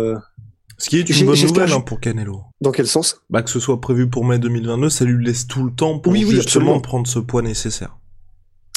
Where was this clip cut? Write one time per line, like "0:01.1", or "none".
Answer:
0:02.5